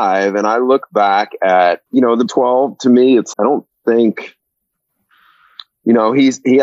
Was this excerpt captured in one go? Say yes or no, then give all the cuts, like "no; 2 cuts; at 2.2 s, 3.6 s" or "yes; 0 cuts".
no; 3 cuts; at 1.9 s, 2.3 s, 3.3 s